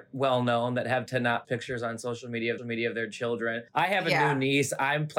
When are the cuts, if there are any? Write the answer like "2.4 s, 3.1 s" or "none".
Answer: 1.1 s, 1.4 s, 2.6 s, 3.7 s